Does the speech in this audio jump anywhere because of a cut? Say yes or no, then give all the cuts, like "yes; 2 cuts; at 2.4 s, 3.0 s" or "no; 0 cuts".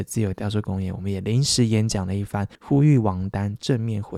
yes; 1 cut; at 2.5 s